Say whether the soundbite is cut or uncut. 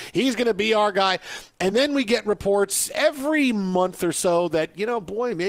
uncut